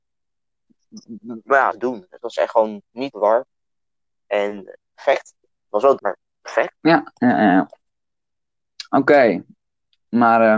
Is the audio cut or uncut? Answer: cut